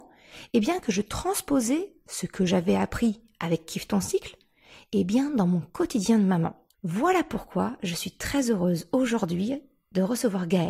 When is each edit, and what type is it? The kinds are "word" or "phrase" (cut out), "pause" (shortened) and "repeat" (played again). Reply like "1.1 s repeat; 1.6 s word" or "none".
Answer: 6.7 s pause